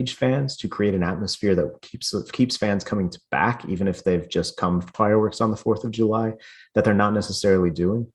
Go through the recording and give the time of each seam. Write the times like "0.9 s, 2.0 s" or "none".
4.9 s

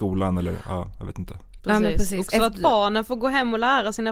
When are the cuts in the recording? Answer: none

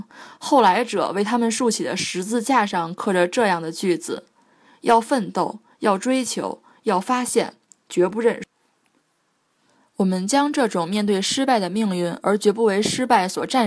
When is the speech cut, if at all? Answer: none

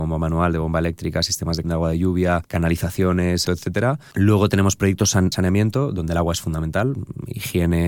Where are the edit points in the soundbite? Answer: 1.6 s, 3.4 s, 5.3 s

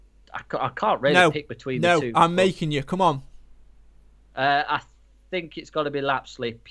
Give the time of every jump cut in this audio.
none

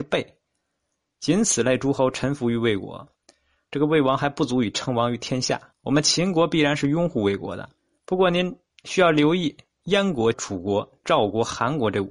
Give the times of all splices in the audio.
5.7 s, 7.8 s, 10.3 s

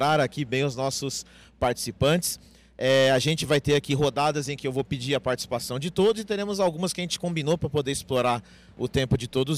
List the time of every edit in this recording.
none

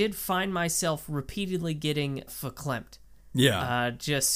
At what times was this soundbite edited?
2.3 s, 3.2 s

